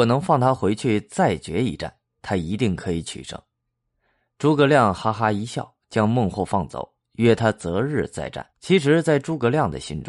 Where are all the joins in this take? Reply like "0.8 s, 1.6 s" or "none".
8.5 s